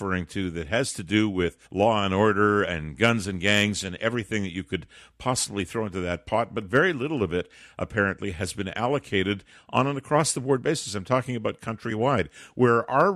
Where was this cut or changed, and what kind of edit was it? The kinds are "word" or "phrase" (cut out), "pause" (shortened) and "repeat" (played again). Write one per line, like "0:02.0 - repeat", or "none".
0:01.6 - pause